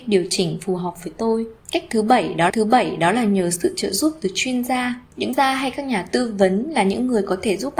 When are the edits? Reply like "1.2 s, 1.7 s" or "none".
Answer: 2.5 s, 5.3 s